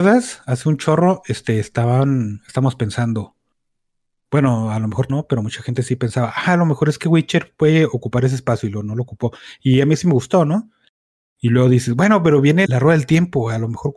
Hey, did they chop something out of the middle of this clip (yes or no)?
yes